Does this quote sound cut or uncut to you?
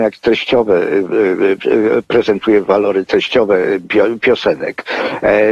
uncut